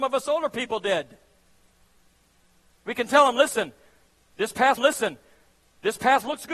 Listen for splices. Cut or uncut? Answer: cut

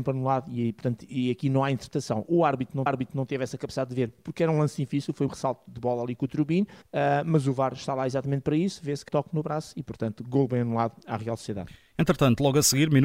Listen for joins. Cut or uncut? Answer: cut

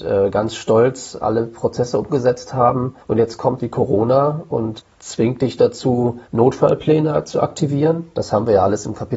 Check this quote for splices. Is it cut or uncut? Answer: cut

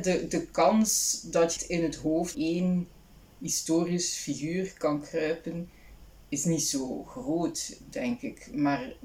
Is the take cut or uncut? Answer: cut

